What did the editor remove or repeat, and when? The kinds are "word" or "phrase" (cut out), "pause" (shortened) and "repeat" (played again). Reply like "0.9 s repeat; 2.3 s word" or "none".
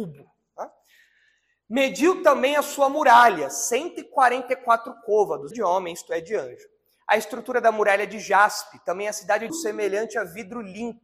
5.5 s word; 9.5 s phrase